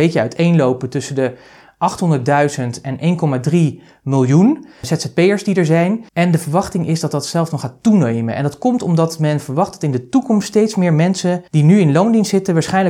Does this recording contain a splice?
yes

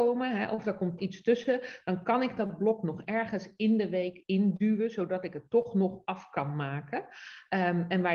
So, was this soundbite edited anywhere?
yes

